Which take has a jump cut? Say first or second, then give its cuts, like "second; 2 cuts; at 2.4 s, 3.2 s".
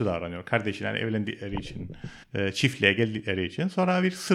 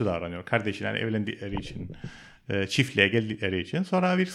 first; 1 cut; at 2.2 s